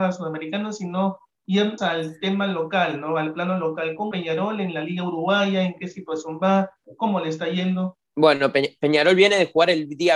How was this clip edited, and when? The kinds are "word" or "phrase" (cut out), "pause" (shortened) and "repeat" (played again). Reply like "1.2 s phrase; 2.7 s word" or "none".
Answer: 1.8 s word; 4.1 s word; 8.0 s pause

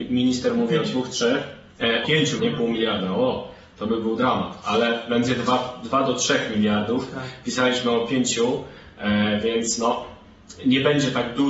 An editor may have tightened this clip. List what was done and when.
2.0 s word; 2.4 s word

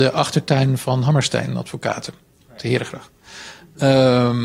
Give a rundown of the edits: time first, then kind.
none

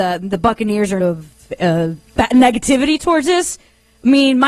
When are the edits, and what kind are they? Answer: 1.0 s phrase; 2.1 s pause

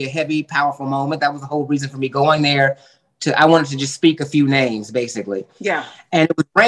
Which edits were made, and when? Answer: none

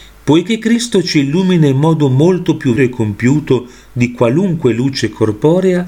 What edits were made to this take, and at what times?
2.8 s word

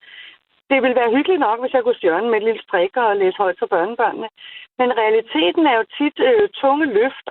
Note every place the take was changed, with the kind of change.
2.0 s word; 2.6 s word

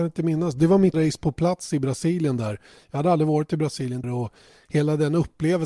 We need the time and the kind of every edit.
0.9 s word; 4.0 s word

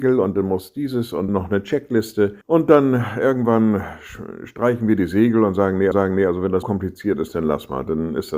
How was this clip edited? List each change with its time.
1.3 s word; 2.4 s pause; 5.9 s repeat; 6.6 s word

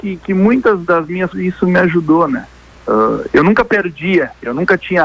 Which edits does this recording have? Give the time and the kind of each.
1.3 s word; 3.3 s word

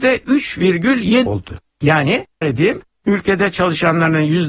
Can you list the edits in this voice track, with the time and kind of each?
1.3 s word; 2.4 s word

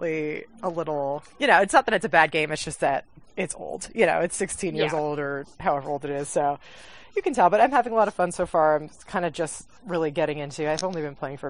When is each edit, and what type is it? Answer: none

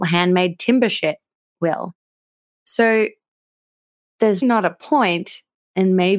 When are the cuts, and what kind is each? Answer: 4.4 s word

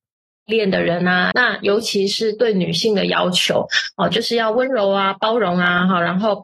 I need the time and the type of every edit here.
1.3 s phrase

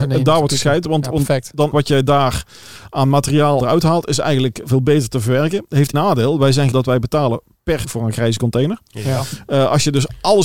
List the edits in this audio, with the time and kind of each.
1.7 s word; 3.6 s word; 4.6 s word; 5.9 s word; 6.7 s word; 7.8 s word

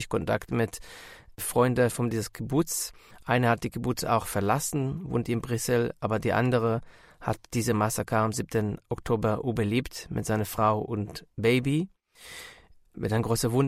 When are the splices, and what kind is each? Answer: none

